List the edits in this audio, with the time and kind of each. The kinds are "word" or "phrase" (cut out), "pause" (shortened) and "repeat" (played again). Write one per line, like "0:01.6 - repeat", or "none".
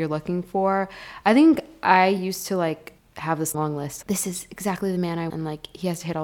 0:03.0 - pause
0:03.5 - word
0:04.0 - word
0:05.3 - word